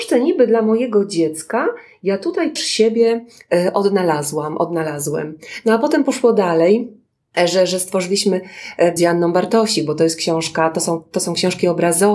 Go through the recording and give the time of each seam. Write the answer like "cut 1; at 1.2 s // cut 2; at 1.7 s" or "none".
cut 1; at 2.6 s // cut 2; at 9.0 s